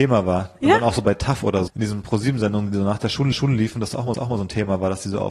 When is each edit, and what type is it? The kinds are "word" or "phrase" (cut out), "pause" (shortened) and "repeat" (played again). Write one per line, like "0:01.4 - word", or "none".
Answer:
0:01.7 - word
0:03.3 - repeat
0:04.1 - repeat